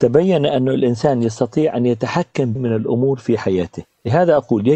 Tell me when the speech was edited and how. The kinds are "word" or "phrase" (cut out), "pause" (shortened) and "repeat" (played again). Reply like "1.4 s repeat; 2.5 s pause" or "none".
2.6 s word